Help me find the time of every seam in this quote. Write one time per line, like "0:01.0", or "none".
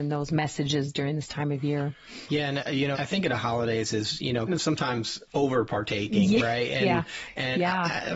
0:02.9
0:04.5